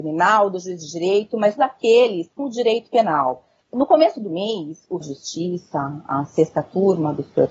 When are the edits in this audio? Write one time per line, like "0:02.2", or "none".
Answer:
0:01.6
0:02.4
0:05.0